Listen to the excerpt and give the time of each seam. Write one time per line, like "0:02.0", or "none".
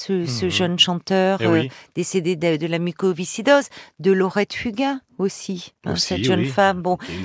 0:05.1